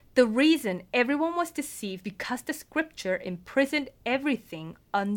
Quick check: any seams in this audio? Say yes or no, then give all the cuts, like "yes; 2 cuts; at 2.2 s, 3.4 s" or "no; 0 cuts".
yes; 1 cut; at 2.0 s